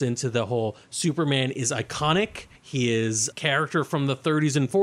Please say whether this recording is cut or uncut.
cut